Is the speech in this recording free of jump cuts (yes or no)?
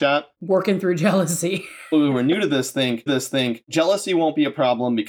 no